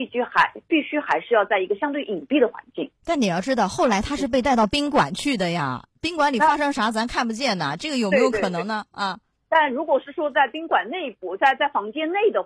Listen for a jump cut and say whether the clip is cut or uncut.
cut